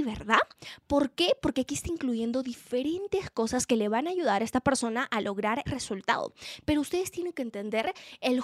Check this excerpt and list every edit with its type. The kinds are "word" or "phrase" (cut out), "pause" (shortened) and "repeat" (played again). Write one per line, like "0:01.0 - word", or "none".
0:05.7 - word